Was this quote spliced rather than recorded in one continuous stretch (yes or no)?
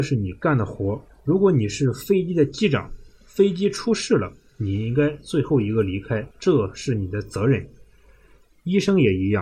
yes